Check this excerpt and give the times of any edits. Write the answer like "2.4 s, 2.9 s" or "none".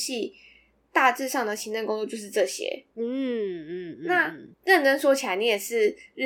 2.9 s, 4.5 s